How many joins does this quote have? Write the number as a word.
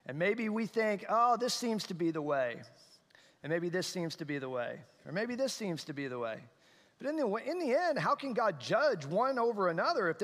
zero